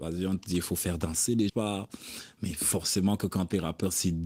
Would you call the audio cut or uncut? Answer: cut